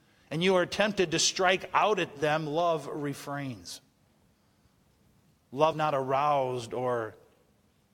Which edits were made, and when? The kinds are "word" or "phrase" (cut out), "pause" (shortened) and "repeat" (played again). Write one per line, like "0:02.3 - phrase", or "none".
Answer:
0:05.7 - word

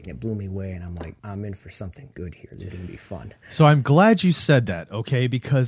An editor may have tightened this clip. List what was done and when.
0:01.2 - pause
0:02.7 - word

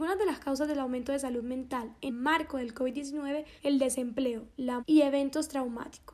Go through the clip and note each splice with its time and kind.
0:02.1 - word
0:03.6 - word
0:04.8 - word

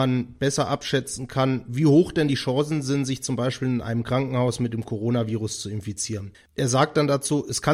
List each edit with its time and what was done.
0:06.3 - pause

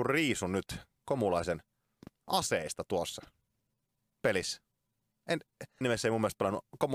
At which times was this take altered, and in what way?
0:02.1 - pause
0:05.8 - word

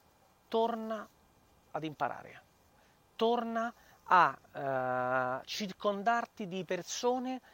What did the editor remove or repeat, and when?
none

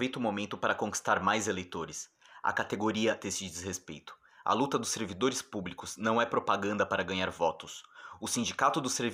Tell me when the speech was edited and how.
0:03.2 - phrase

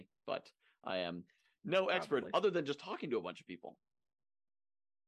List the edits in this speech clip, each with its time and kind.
none

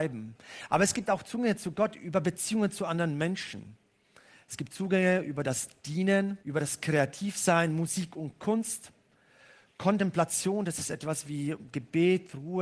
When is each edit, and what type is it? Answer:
0:06.4 - pause

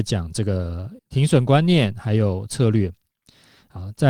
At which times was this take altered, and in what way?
0:01.0 - pause

